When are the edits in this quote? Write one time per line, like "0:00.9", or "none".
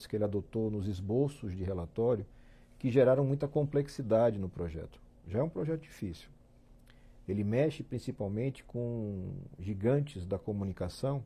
none